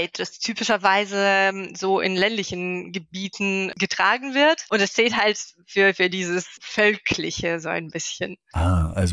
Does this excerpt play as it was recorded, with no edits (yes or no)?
yes